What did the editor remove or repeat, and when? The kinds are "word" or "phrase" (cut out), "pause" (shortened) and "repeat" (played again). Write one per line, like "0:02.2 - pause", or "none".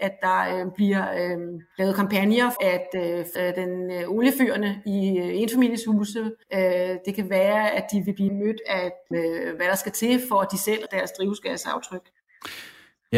0:02.6 - word
0:03.4 - phrase
0:06.4 - pause
0:08.3 - word
0:09.1 - phrase
0:10.9 - word

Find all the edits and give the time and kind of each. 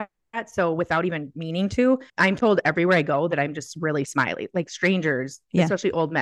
0:02.1 - pause

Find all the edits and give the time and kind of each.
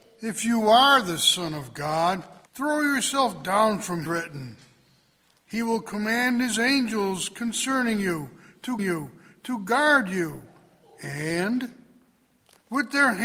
0:02.5 - pause
0:04.1 - phrase
0:08.8 - repeat

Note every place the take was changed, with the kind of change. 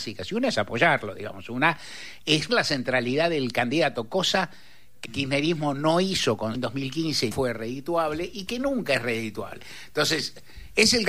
0:02.5 - word
0:05.1 - word
0:06.6 - word
0:07.3 - word

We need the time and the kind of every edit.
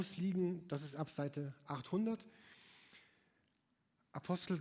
none

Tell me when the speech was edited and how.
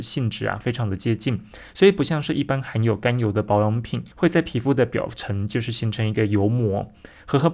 0:04.1 - pause

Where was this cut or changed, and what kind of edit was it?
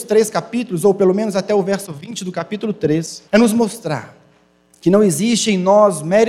0:03.3 - pause

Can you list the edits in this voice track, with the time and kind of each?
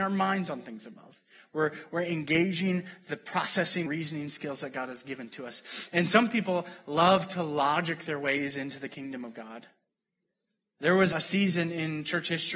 0:03.9 - word
0:11.1 - word

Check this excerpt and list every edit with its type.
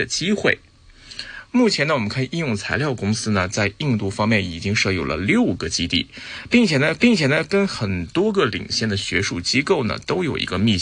0:07.0 - repeat

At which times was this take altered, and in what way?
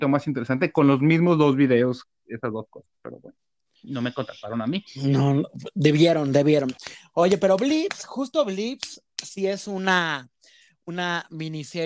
0:04.9 - pause

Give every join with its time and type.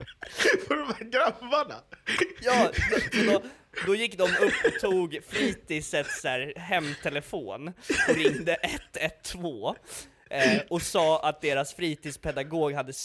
none

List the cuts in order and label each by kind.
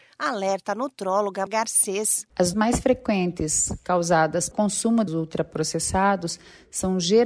0:01.5 - word
0:02.5 - word
0:04.5 - phrase
0:05.1 - word

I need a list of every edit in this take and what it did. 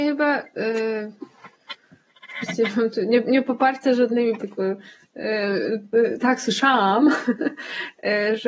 0:04.4 - word

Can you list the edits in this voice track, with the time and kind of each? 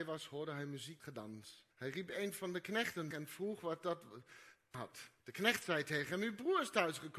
0:01.0 - word
0:01.7 - pause
0:03.1 - phrase
0:04.7 - word
0:05.2 - pause

